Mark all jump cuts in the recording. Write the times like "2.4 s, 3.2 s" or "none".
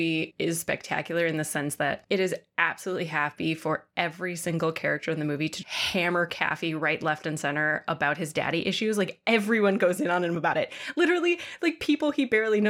5.6 s